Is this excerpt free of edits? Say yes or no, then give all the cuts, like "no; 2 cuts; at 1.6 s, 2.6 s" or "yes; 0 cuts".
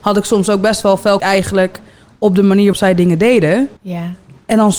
no; 3 cuts; at 1.2 s, 2.7 s, 3.8 s